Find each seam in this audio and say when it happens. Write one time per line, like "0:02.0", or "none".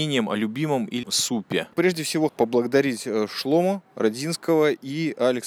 0:01.0
0:01.7
0:02.3